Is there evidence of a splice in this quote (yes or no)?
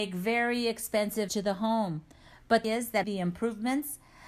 yes